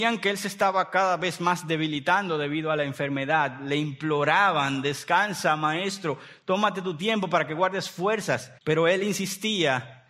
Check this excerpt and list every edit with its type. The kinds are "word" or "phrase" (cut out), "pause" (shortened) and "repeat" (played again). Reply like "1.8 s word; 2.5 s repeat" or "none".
8.6 s pause